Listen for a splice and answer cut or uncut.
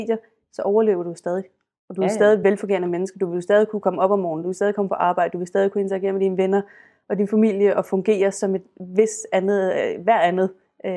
uncut